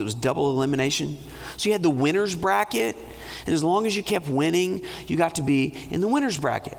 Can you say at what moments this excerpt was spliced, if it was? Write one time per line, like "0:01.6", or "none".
none